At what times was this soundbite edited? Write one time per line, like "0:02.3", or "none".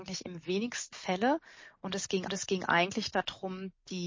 0:00.9
0:02.3